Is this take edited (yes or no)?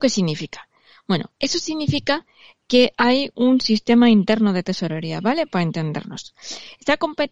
yes